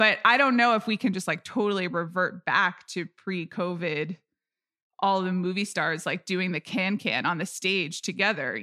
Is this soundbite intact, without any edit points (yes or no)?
yes